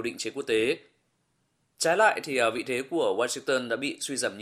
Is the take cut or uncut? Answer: uncut